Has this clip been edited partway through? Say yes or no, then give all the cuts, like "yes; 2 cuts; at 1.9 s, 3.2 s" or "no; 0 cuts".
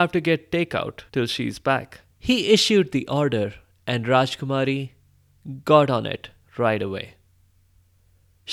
yes; 2 cuts; at 1.1 s, 2.1 s